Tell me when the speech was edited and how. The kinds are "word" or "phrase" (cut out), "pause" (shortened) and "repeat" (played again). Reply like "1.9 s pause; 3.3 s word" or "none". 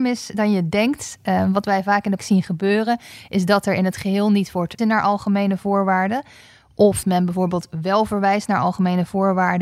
2.2 s word; 4.8 s word; 7.0 s word